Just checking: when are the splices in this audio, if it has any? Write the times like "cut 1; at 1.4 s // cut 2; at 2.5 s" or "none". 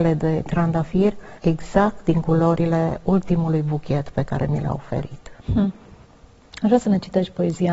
cut 1; at 1.4 s // cut 2; at 5.4 s